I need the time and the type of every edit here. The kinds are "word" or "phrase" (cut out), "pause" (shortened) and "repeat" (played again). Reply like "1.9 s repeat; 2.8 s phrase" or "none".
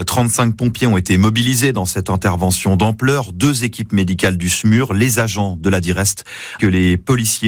6.6 s word